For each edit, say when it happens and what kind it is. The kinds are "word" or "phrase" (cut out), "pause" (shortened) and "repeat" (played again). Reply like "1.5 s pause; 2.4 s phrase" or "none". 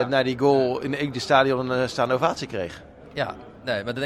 none